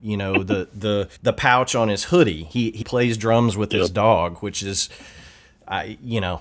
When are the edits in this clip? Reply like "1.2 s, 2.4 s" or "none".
1.2 s, 2.8 s